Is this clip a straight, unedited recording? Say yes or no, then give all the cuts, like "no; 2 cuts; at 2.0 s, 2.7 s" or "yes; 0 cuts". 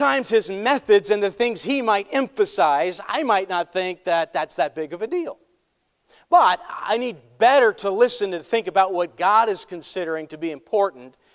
yes; 0 cuts